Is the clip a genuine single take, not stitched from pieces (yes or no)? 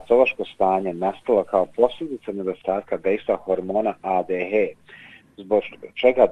yes